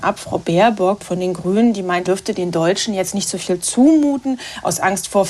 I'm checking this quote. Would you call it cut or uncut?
cut